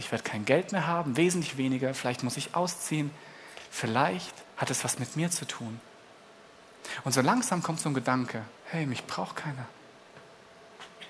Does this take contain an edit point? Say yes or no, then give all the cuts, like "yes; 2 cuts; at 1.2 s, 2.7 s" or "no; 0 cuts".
yes; 2 cuts; at 4.4 s, 8.6 s